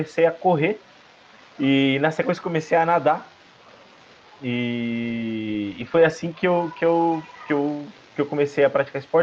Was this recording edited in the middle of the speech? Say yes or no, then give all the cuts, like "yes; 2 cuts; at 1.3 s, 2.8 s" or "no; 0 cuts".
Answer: no; 0 cuts